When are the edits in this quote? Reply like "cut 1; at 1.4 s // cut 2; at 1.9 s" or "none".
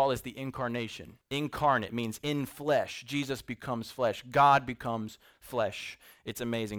cut 1; at 1.2 s